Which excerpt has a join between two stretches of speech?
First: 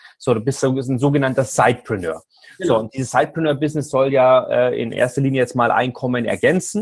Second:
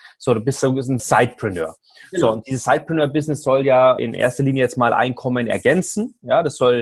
second; 2 cuts; at 1.0 s, 4.0 s

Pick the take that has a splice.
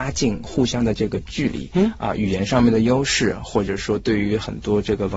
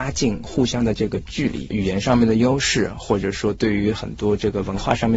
second; 1 cut; at 1.7 s

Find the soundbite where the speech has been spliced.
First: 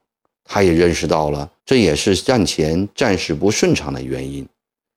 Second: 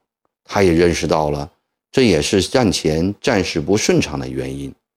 first; 1 cut; at 1.6 s

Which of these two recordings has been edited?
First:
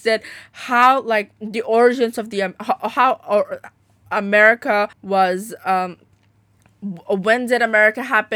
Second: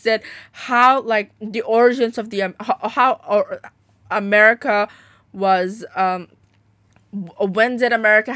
first; 1 cut; at 4.9 s

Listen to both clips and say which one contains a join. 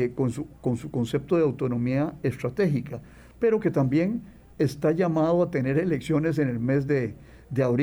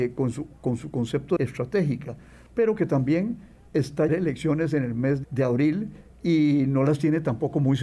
second; 3 cuts; at 1.4 s, 4.1 s, 5.2 s

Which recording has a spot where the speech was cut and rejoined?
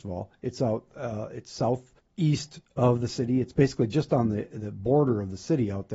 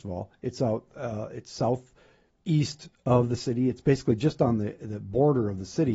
first; 1 cut; at 2.0 s

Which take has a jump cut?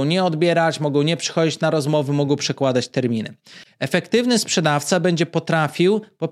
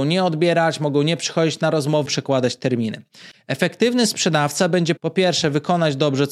second; 2 cuts; at 2.1 s, 5.0 s

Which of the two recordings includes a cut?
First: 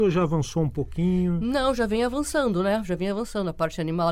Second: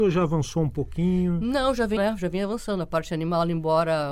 second; 1 cut; at 2.0 s

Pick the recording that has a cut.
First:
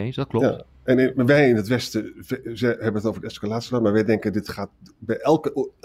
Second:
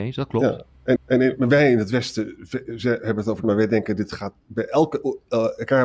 second; 3 cuts; at 1.0 s, 3.4 s, 4.4 s

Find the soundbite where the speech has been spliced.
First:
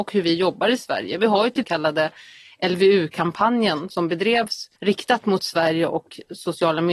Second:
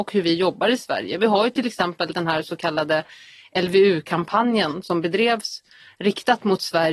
first; 2 cuts; at 1.6 s, 4.8 s

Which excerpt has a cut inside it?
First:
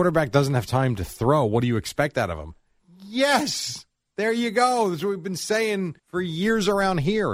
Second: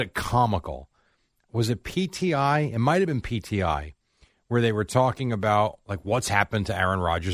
first; 2 cuts; at 2.8 s, 6.0 s

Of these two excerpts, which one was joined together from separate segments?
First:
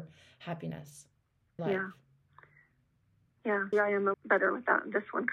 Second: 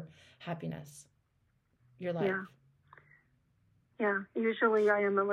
first; 3 cuts; at 1.6 s, 3.7 s, 4.1 s

